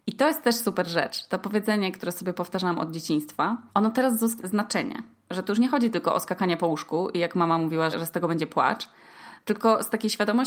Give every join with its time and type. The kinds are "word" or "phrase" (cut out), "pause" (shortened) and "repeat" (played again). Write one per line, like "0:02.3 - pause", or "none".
0:03.7 - pause
0:04.4 - phrase
0:07.9 - word